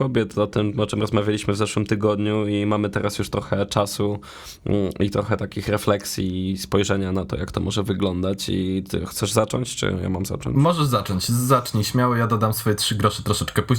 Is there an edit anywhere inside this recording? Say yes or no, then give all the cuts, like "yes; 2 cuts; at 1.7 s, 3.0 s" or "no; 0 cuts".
no; 0 cuts